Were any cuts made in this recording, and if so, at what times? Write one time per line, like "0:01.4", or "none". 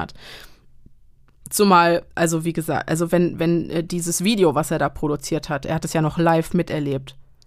none

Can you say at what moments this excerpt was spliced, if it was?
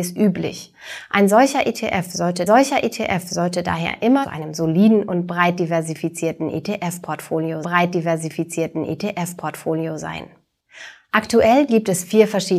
0:02.5
0:04.2
0:07.6

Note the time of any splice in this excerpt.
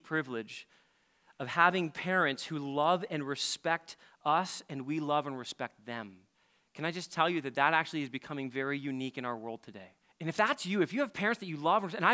0:06.3
0:10.0

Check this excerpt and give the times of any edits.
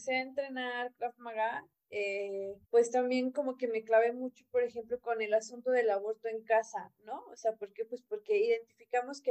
0:02.6

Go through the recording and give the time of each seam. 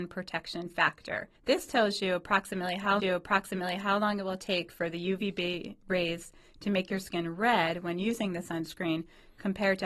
0:01.3
0:03.0

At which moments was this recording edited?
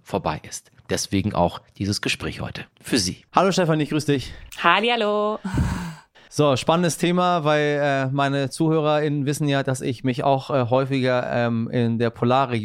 0:02.7
0:03.3
0:04.5

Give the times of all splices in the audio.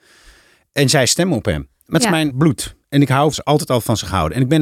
0:02.3
0:02.8
0:03.3

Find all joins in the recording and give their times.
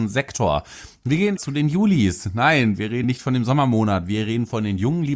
0:01.4
0:03.0

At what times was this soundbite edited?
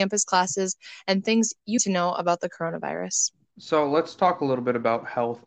0:01.8

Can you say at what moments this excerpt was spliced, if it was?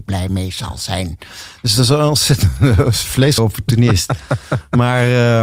0:03.4

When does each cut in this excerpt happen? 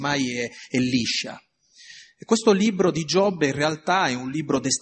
none

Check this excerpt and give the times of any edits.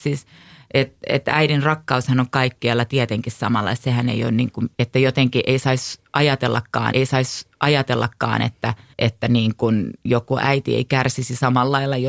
0:04.7
0:06.9
0:08.9

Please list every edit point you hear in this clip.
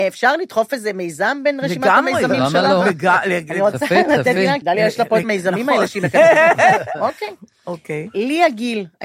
0:04.6
0:05.2

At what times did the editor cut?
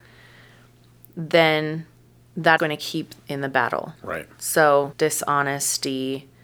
0:02.6
0:03.2
0:04.0
0:04.9

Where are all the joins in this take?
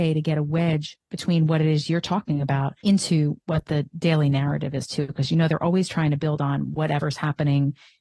0:02.8

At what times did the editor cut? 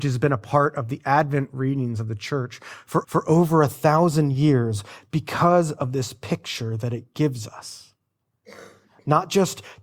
0:03.0

